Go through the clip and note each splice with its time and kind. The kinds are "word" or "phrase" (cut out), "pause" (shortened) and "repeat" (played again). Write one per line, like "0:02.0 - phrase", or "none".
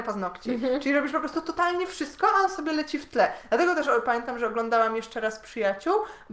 none

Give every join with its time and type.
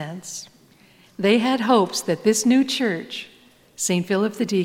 none

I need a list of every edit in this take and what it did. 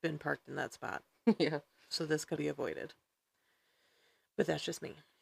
0:02.4 - word

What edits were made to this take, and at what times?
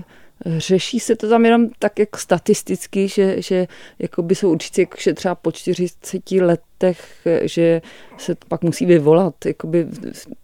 0:04.7 - word
0:08.4 - word

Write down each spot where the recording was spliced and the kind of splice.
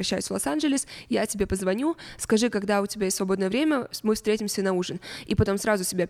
none

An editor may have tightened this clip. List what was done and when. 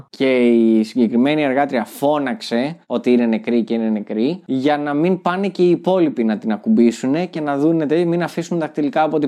none

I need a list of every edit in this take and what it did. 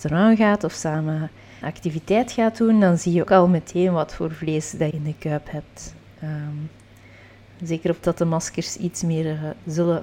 0:01.6 - word
0:03.3 - word
0:04.9 - word
0:08.0 - word

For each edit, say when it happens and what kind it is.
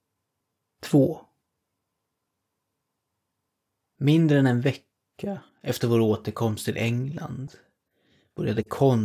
none

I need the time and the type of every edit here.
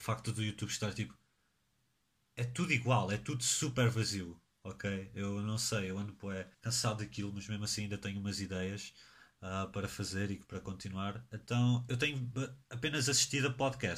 0:06.5 - pause

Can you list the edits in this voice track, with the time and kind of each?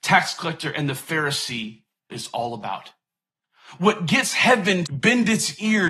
0:02.1 - word
0:04.8 - word

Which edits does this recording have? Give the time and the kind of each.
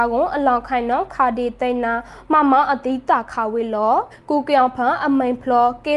0:04.1 - pause

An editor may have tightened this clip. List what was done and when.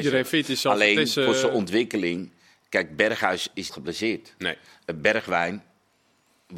0:03.7 - phrase

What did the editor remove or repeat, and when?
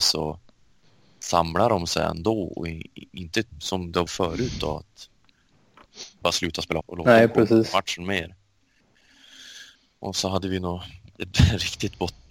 0:03.5 - pause
0:04.1 - word
0:06.2 - word
0:06.8 - word
0:09.8 - pause

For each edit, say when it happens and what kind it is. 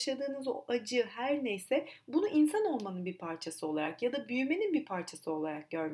none

